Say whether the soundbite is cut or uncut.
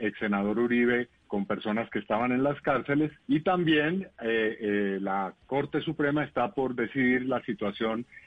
cut